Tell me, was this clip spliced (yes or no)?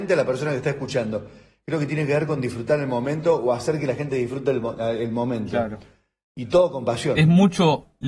no